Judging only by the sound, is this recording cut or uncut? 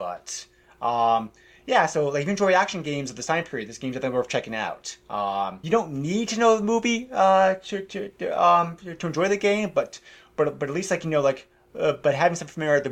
cut